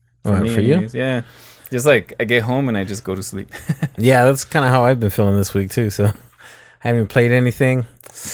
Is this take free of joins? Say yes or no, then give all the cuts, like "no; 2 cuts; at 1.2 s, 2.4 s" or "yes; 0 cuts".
yes; 0 cuts